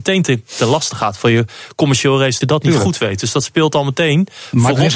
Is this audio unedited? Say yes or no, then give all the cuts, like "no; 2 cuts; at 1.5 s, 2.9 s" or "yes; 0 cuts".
no; 1 cut; at 2.4 s